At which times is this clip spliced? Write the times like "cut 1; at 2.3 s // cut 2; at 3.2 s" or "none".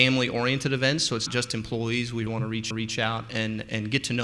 cut 1; at 1.3 s // cut 2; at 2.3 s // cut 3; at 2.7 s